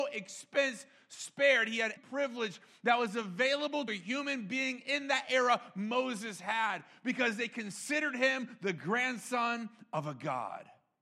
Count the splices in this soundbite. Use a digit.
2